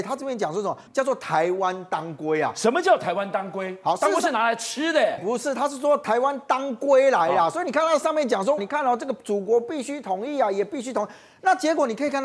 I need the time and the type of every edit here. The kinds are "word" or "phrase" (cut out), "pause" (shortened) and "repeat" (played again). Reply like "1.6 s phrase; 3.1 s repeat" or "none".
5.2 s word; 8.6 s word